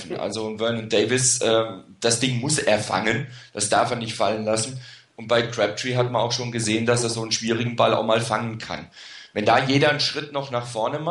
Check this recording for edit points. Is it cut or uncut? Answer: uncut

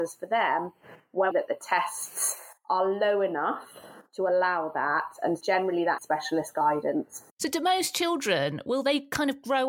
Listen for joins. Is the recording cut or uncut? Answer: cut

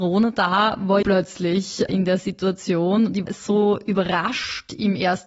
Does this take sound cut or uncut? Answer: cut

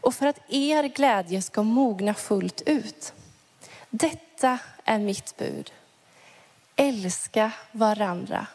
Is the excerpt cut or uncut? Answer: uncut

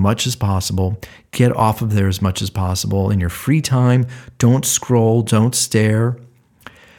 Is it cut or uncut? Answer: uncut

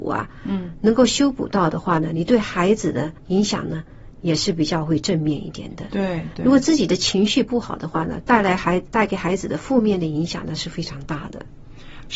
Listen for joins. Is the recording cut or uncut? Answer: cut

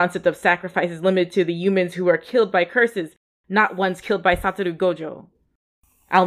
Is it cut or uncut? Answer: uncut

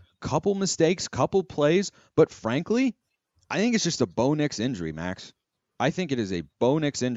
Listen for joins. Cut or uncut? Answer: uncut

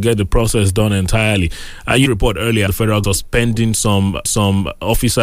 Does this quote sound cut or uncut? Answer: cut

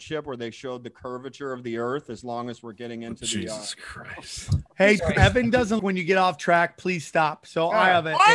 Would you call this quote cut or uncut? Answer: cut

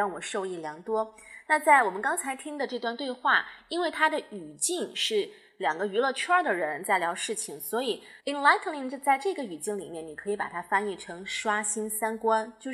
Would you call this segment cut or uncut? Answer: cut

